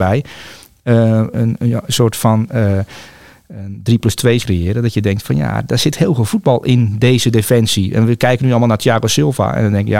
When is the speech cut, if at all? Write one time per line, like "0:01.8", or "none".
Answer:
0:01.3
0:04.4